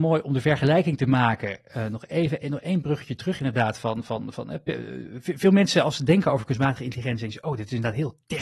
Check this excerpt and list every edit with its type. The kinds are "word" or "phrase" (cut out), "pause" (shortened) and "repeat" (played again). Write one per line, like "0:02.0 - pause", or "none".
none